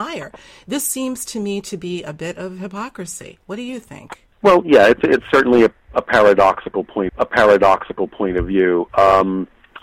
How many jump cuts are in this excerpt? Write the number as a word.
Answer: two